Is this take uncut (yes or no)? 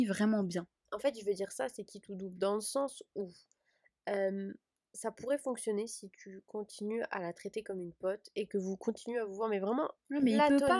yes